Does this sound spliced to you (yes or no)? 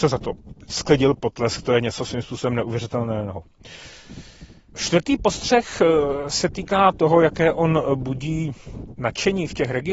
no